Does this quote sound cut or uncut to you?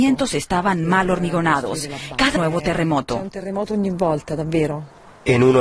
cut